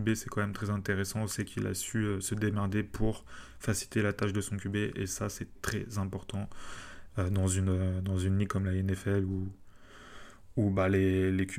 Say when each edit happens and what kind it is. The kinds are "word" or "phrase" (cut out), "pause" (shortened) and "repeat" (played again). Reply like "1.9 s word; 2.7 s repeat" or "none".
5.5 s word